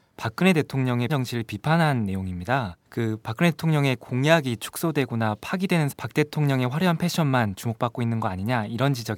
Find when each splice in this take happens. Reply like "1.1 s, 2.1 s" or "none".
1.1 s, 2.9 s, 5.9 s